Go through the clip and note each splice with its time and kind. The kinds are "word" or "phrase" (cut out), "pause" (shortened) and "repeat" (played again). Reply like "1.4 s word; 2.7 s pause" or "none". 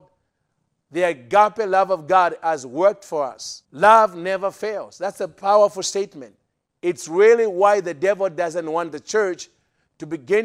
3.6 s pause; 6.5 s pause